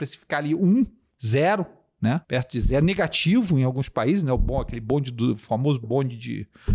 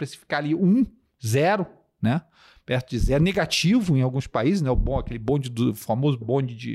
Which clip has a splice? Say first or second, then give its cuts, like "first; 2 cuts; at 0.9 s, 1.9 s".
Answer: first; 1 cut; at 2.2 s